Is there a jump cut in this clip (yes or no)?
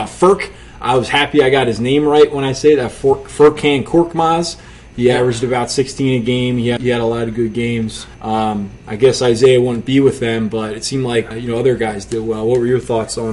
yes